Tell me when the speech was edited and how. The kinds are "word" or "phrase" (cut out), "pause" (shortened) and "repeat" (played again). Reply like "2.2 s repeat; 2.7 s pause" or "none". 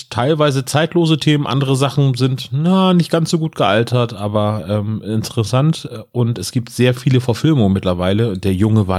none